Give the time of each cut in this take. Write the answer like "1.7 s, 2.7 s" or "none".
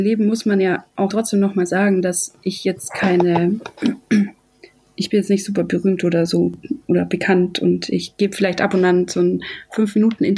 1.1 s